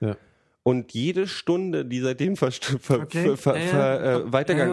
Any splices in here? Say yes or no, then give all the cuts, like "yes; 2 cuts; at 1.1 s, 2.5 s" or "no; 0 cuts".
no; 0 cuts